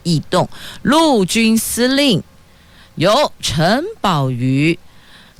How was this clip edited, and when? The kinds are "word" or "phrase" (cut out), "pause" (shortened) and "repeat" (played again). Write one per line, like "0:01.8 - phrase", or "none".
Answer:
none